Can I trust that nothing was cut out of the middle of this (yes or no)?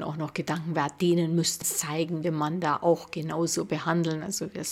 no